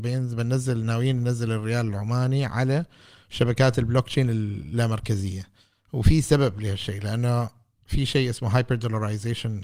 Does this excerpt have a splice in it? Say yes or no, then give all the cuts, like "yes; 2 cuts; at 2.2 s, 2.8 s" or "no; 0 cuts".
no; 0 cuts